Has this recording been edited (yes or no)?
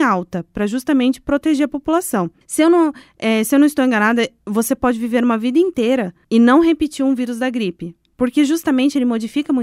yes